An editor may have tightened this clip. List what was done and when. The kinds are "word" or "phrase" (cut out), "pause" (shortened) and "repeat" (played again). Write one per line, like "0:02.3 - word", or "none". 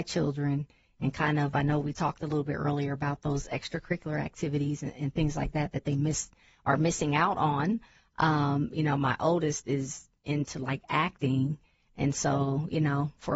none